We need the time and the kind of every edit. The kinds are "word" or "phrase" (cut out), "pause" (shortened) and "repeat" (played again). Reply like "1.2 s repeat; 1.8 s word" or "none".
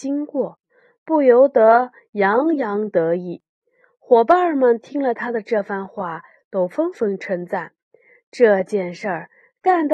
none